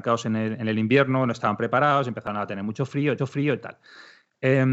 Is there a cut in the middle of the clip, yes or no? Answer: yes